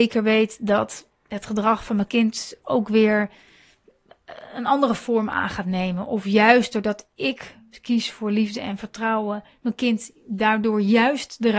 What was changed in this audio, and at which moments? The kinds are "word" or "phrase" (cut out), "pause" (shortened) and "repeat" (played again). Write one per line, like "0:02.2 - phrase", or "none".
0:01.2 - pause